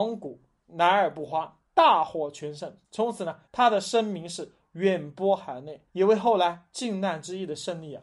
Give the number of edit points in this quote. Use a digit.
4